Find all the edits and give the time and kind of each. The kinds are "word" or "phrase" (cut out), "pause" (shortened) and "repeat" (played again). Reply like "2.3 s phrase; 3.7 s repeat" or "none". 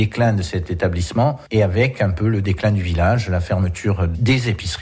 none